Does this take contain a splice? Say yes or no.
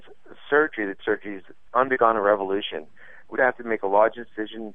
yes